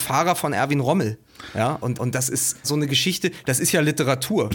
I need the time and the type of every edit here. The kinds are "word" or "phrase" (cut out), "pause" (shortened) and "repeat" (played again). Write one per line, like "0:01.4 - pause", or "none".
0:01.9 - repeat
0:02.6 - word